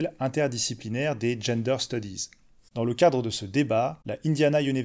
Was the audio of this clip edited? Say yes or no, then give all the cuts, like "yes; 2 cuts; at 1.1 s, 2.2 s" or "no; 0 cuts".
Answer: no; 0 cuts